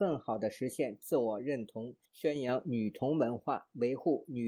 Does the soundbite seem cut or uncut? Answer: cut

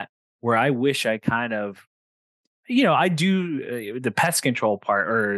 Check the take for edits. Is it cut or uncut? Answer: uncut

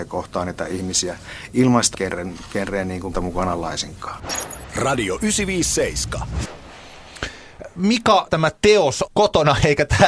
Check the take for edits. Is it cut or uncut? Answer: cut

